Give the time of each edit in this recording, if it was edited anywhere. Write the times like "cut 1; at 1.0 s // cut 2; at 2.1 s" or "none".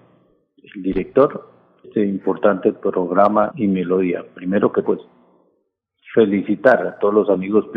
cut 1; at 1.8 s // cut 2; at 3.5 s // cut 3; at 4.8 s